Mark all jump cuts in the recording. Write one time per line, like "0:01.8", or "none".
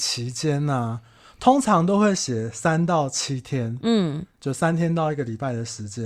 none